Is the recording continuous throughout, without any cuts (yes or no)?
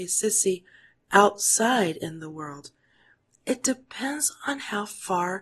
yes